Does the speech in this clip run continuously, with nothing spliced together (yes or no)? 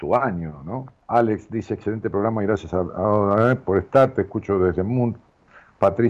no